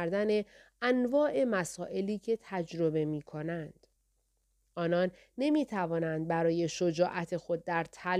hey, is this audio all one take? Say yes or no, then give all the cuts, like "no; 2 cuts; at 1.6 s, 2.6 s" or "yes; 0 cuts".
yes; 0 cuts